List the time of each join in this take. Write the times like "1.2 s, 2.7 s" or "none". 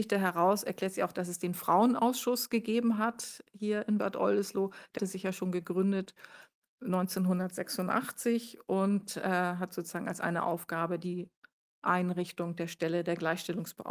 5.0 s